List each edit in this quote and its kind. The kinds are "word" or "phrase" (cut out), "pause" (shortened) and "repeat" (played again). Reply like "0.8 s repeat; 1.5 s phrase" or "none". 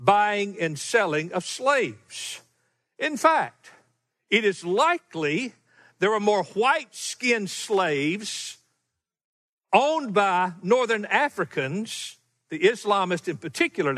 none